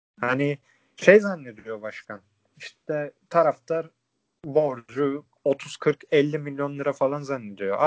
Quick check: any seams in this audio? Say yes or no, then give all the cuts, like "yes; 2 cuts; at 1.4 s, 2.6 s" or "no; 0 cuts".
no; 0 cuts